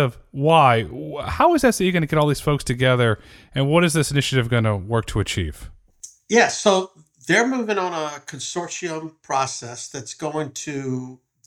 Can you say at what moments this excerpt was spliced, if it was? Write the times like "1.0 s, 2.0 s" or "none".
none